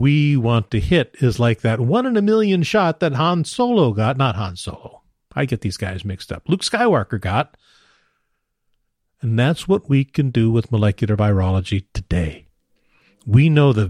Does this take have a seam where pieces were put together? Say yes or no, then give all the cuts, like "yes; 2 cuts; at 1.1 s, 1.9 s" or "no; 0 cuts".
no; 0 cuts